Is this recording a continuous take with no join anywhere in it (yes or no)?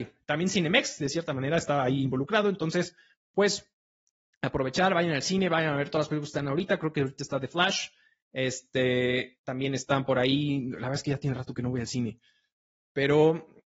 yes